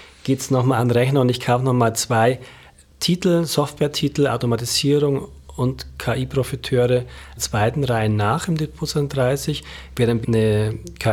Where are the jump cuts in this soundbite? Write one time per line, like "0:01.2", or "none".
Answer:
0:07.4
0:10.2